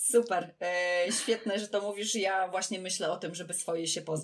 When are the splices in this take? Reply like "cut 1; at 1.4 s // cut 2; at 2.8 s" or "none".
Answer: none